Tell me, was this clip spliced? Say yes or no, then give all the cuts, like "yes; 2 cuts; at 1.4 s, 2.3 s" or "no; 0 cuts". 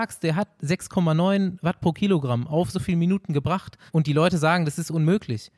yes; 2 cuts; at 2.7 s, 3.9 s